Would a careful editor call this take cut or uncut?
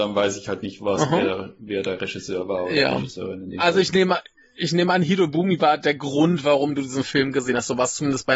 uncut